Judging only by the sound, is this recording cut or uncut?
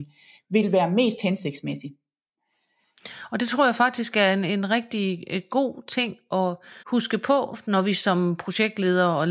cut